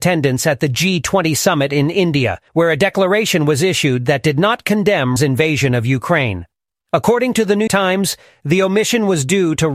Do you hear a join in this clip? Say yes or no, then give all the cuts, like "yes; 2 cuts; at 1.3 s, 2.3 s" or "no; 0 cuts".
yes; 3 cuts; at 2.5 s, 5.2 s, 7.7 s